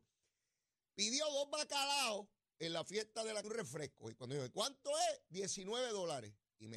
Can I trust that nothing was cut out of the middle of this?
no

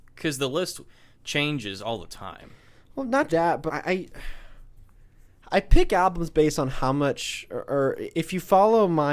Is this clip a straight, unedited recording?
no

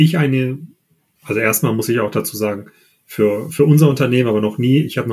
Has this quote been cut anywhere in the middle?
no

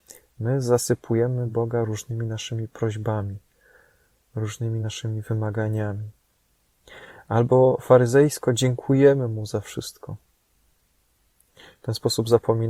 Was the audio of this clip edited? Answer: no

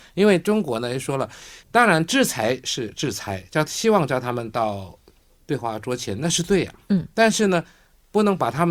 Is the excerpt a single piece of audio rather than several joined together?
no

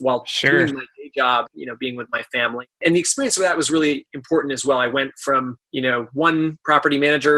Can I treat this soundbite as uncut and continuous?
no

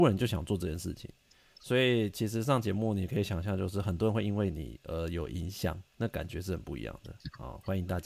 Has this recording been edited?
no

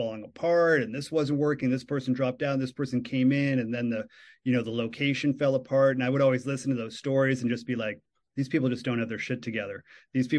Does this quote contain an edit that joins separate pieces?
no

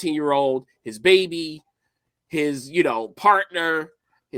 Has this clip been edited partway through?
no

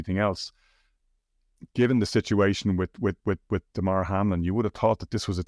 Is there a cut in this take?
no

